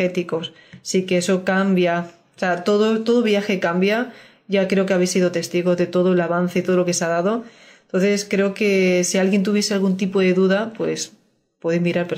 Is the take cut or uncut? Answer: uncut